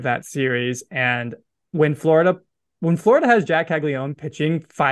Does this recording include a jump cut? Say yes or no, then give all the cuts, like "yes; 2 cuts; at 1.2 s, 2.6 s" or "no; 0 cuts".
no; 0 cuts